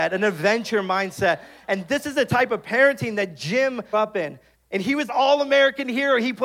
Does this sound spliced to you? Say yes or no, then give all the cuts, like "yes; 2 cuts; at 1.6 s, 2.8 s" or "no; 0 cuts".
yes; 3 cuts; at 3.9 s, 4.5 s, 5.1 s